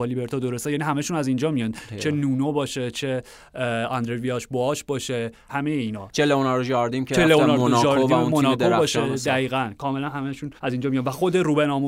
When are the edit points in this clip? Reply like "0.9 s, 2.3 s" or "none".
5.5 s, 10.6 s